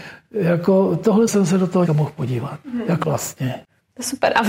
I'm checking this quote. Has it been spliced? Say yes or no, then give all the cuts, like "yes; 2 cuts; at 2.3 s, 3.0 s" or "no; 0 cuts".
yes; 4 cuts; at 1.3 s, 1.8 s, 2.6 s, 3.0 s